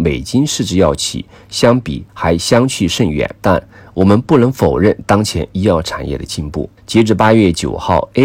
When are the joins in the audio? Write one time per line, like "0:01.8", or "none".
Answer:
0:02.1
0:03.4
0:06.8

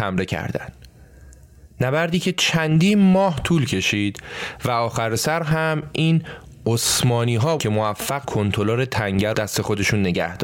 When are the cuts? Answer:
0:07.6
0:08.2
0:09.3

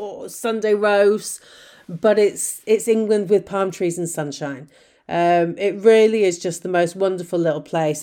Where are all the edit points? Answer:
none

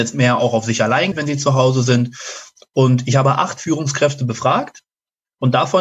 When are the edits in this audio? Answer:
0:01.1

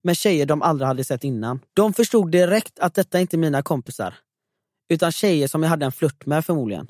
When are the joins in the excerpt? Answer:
0:01.7

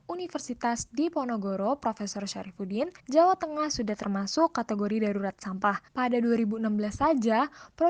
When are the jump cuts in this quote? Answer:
0:03.0
0:05.9

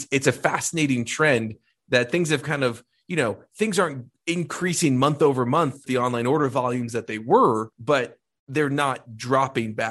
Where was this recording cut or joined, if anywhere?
0:05.9
0:07.7

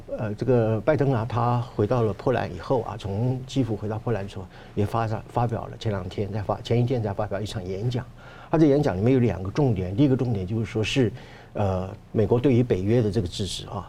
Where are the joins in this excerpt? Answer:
0:12.0

